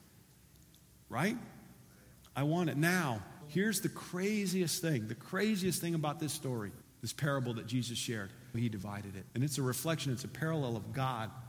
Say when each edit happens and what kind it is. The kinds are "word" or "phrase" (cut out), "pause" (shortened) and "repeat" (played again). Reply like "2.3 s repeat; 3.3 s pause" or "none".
2.1 s pause; 3.4 s word; 6.8 s pause; 8.5 s word; 9.3 s pause